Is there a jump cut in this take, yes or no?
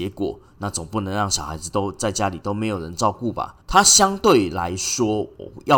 yes